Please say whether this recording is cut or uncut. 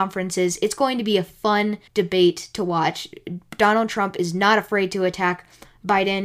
cut